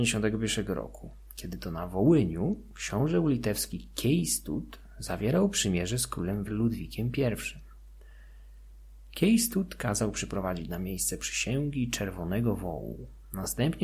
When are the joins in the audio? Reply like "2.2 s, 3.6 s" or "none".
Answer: 6.4 s